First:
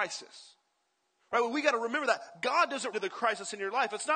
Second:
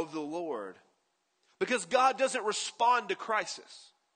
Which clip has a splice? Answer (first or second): first